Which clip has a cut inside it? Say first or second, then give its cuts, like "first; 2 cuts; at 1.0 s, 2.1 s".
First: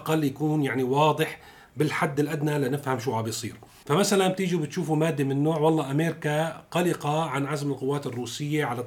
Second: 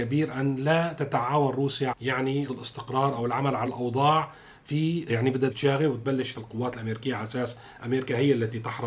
second; 6 cuts; at 1.9 s, 2.5 s, 3.7 s, 5.1 s, 5.5 s, 6.3 s